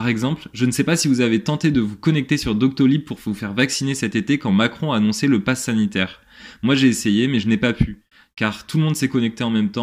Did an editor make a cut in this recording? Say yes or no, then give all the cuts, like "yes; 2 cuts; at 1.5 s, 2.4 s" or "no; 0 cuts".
no; 0 cuts